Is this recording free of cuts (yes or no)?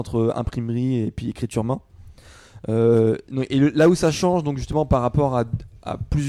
yes